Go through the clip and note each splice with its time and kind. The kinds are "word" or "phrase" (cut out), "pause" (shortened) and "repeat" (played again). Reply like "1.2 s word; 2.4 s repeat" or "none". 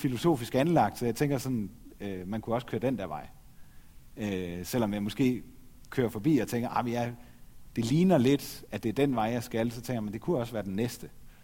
none